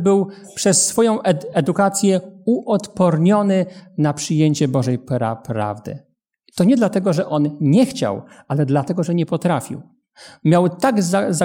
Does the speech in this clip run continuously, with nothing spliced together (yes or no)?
yes